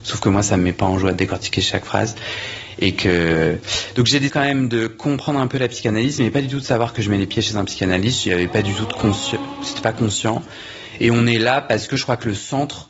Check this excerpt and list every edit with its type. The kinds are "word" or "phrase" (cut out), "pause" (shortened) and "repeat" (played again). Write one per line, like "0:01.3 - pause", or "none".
0:04.3 - word